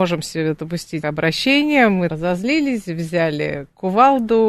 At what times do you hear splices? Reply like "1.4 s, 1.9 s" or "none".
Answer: 1.0 s, 2.1 s